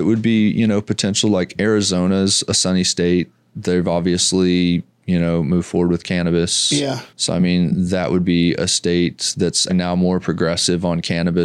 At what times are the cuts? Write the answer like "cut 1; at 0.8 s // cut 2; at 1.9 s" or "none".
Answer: cut 1; at 7.1 s // cut 2; at 9.7 s